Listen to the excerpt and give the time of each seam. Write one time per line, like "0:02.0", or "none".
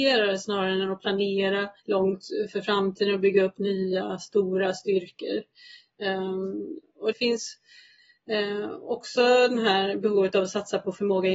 0:01.8
0:07.1